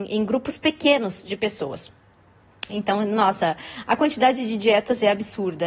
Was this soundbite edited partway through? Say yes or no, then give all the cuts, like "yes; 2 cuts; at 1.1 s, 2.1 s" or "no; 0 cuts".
no; 0 cuts